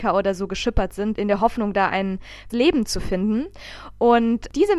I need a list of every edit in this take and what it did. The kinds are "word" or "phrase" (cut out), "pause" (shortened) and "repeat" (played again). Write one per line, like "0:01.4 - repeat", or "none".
0:01.1 - word
0:02.5 - word